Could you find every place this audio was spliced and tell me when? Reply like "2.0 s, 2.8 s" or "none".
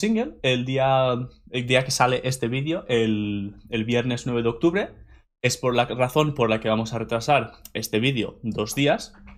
none